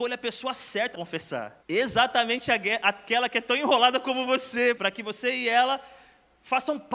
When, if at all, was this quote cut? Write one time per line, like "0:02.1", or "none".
0:00.9
0:01.6
0:04.7